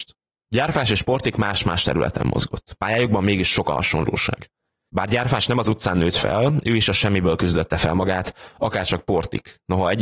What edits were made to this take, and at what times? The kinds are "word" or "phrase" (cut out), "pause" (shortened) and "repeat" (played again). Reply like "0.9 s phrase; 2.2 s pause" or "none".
none